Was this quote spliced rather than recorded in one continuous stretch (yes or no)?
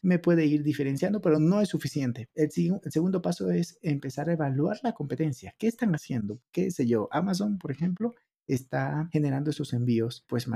no